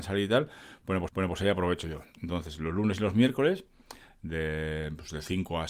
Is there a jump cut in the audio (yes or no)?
yes